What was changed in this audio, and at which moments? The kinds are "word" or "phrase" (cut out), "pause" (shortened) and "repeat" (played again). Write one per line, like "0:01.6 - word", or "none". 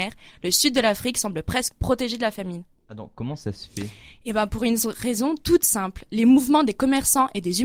none